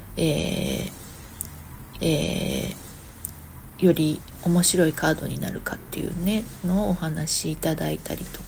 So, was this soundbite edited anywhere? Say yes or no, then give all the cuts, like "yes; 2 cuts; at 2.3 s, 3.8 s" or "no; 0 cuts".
yes; 1 cut; at 1.9 s